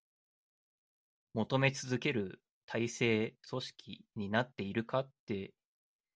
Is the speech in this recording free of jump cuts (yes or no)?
no